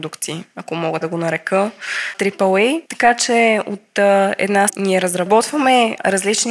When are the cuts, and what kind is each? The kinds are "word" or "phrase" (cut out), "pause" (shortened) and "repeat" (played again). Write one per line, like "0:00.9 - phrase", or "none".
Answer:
0:01.0 - word
0:02.9 - pause
0:04.7 - word

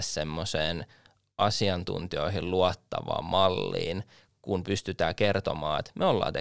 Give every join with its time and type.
none

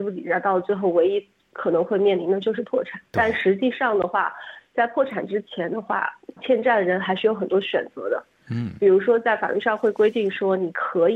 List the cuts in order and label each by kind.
0:06.4 - word

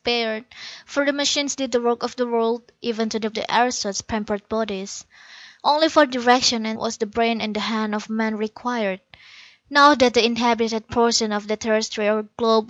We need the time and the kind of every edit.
0:03.3 - phrase
0:06.7 - phrase

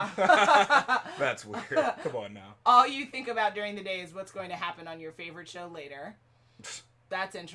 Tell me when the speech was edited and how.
none

